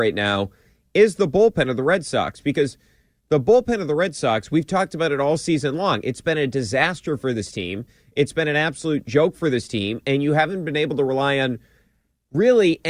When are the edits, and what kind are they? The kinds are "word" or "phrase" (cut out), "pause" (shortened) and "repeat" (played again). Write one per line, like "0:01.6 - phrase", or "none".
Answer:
none